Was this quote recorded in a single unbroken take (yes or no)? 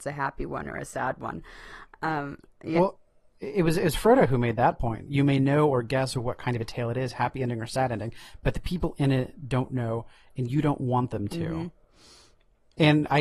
yes